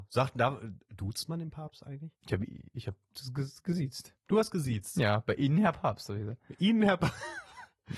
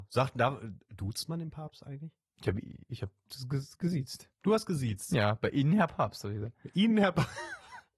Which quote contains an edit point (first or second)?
first